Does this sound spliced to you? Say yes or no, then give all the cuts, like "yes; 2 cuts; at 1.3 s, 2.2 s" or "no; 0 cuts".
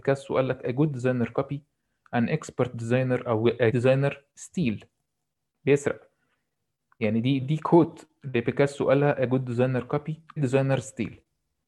yes; 3 cuts; at 3.7 s, 7.4 s, 10.4 s